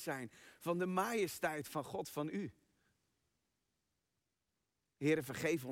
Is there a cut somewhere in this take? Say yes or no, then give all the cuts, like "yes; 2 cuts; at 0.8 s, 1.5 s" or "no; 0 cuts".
no; 0 cuts